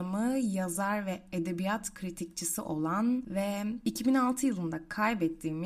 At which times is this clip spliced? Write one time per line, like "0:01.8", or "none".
none